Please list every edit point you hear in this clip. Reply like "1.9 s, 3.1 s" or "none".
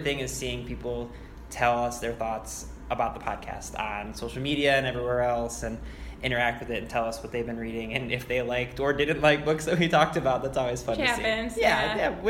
none

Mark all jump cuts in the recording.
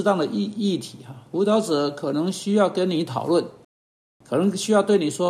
none

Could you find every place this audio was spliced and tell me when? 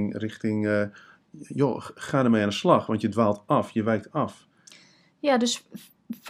none

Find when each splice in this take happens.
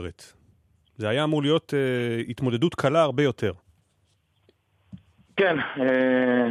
none

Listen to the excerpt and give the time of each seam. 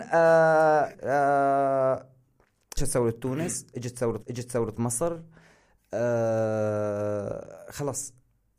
0.9 s, 2.8 s, 4.2 s

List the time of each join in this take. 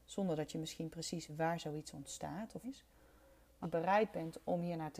1.3 s, 2.6 s, 3.6 s

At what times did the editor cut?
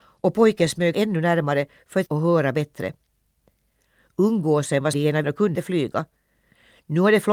0.9 s, 2.1 s, 4.9 s, 5.2 s, 5.5 s

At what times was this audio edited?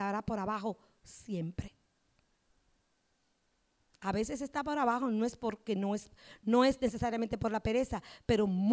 none

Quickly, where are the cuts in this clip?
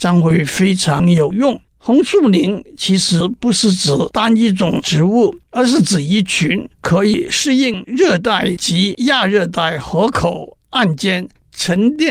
1.7 s, 5.5 s

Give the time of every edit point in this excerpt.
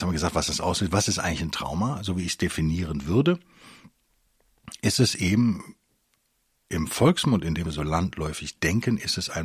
7.6 s

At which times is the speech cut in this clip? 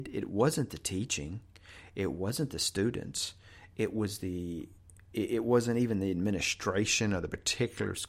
none

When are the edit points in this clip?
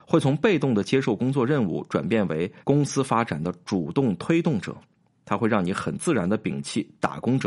2.6 s

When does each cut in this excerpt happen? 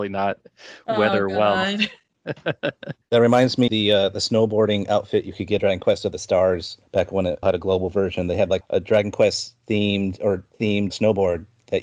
3.7 s, 5.6 s, 7.4 s, 8.6 s, 10.9 s

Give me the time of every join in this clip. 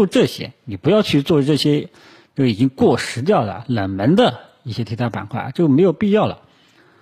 none

